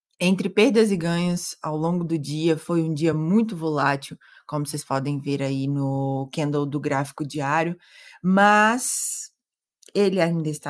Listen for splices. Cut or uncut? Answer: uncut